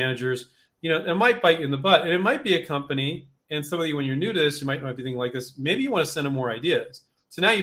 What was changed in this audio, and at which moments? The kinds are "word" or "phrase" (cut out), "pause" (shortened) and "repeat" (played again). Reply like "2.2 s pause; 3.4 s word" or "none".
3.4 s pause